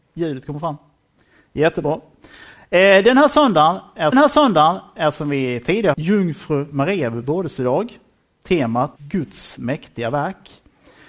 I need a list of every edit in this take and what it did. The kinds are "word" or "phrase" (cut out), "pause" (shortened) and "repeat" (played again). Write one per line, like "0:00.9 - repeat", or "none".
0:04.1 - repeat
0:05.9 - word
0:09.0 - word